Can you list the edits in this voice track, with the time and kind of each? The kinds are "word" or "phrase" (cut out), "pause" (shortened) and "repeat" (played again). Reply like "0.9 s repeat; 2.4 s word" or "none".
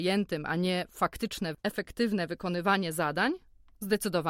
none